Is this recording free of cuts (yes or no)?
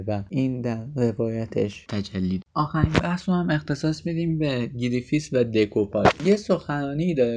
no